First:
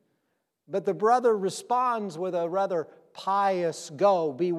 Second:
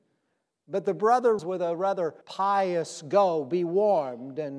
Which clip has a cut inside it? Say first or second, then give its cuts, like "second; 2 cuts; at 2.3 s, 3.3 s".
second; 2 cuts; at 1.4 s, 2.2 s